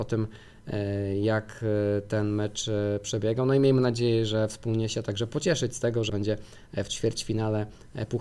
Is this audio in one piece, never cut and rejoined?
no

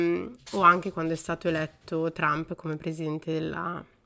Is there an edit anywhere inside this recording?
no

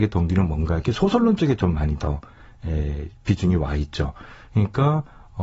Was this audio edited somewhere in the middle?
no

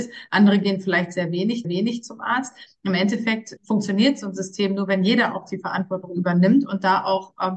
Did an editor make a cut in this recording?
yes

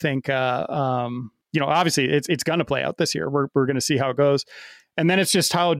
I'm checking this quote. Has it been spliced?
yes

